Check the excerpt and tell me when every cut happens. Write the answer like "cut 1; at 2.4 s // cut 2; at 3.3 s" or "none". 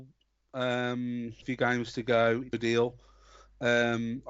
cut 1; at 1.4 s // cut 2; at 2.5 s